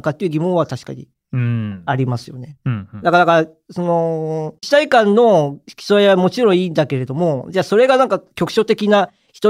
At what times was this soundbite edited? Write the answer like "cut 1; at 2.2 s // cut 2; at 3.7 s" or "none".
cut 1; at 4.6 s